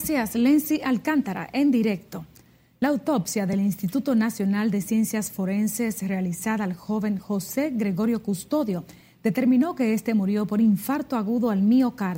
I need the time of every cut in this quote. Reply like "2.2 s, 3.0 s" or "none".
none